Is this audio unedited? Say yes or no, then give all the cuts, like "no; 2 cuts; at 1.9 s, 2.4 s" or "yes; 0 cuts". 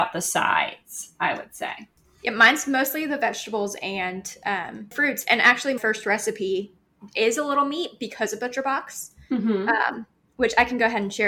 no; 1 cut; at 5.8 s